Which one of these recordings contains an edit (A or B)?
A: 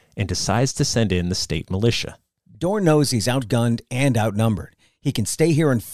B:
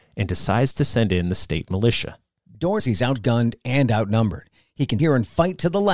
B